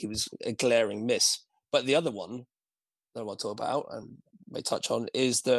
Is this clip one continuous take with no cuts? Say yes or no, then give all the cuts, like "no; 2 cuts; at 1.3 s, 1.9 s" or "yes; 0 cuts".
yes; 0 cuts